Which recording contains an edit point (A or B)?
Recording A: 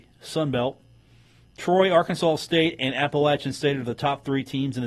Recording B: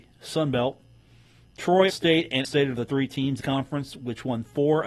B